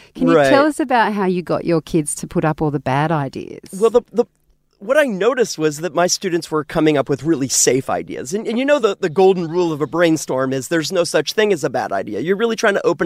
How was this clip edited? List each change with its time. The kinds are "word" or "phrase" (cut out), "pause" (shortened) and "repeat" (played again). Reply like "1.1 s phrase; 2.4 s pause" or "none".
none